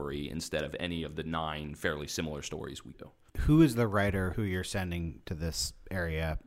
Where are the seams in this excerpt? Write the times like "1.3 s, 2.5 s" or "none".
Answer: 2.9 s, 4.3 s